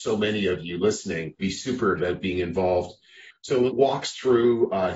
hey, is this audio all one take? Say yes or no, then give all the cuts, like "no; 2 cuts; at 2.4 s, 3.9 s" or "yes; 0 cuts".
no; 3 cuts; at 1.4 s, 2.0 s, 3.7 s